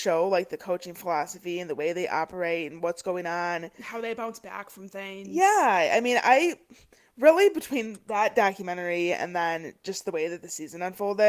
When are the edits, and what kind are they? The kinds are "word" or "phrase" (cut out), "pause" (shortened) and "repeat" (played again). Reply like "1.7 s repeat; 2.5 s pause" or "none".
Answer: none